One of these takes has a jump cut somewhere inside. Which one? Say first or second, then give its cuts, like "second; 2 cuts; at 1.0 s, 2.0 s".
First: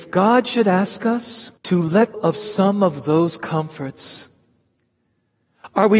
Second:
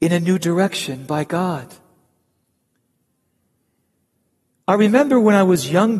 first; 2 cuts; at 1.6 s, 2.1 s